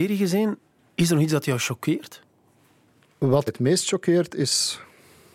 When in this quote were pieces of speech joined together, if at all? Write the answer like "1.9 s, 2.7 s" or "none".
3.5 s